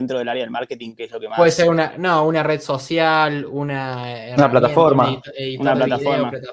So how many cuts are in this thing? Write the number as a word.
zero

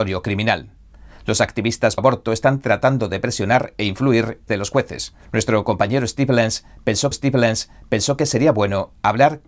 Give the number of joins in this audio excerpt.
four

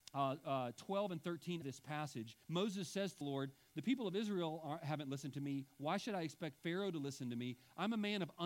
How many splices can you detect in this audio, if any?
three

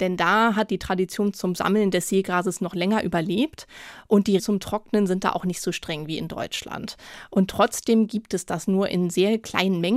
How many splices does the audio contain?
one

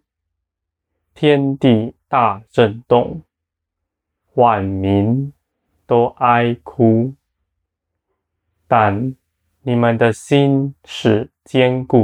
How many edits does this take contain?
one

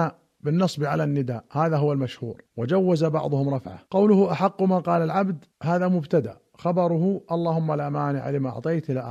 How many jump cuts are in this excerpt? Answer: three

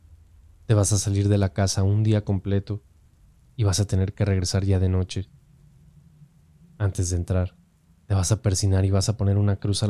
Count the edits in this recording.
zero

